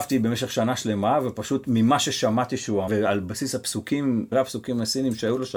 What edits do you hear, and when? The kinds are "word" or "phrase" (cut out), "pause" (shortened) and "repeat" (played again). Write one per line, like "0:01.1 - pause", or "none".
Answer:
0:02.9 - word
0:04.3 - word

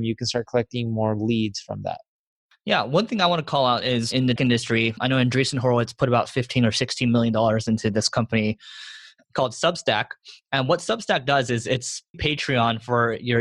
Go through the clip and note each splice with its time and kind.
0:04.4 - word
0:12.1 - word

